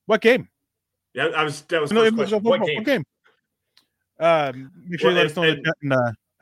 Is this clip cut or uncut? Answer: cut